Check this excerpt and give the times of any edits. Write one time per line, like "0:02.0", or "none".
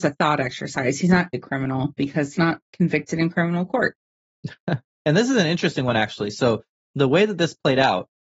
0:01.3
0:02.4
0:04.2